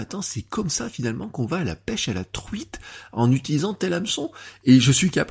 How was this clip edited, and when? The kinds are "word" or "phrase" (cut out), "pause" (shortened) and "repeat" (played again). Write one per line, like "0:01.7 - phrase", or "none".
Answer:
none